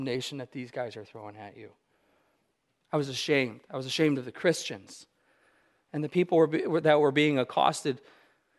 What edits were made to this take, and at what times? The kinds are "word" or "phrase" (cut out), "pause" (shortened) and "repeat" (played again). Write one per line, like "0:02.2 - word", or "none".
none